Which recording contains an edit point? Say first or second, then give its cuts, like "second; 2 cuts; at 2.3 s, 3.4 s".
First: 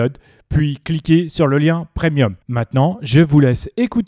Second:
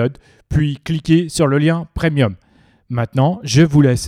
first; 1 cut; at 2.4 s